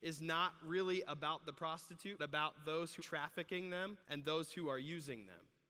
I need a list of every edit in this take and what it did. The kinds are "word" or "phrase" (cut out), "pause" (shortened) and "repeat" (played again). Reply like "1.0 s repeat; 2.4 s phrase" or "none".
2.2 s word; 3.0 s word; 4.0 s pause